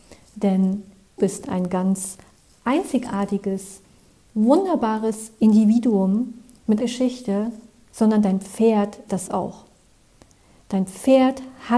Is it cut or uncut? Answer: cut